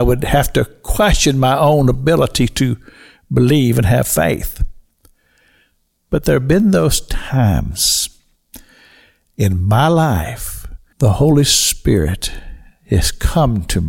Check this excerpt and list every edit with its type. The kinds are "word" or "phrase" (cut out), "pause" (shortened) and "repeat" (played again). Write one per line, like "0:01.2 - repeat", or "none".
0:10.9 - word